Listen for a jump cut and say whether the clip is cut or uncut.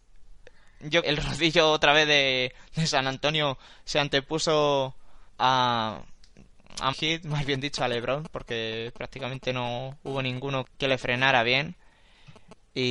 cut